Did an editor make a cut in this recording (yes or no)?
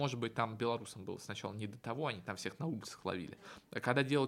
no